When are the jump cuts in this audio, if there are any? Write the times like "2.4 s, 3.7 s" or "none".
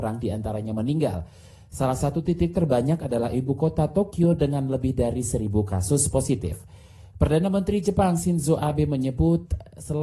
none